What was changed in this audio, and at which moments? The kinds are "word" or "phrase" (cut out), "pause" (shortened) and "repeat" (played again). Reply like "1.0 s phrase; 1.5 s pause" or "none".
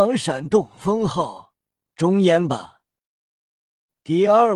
none